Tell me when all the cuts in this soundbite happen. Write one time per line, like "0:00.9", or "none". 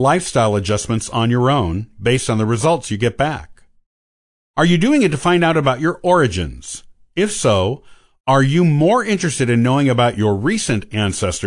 none